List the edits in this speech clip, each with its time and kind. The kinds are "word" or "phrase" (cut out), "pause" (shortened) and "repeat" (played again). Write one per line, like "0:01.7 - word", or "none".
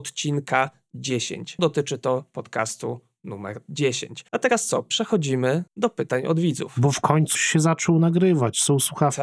0:01.6 - word
0:04.3 - pause
0:05.7 - pause
0:07.4 - word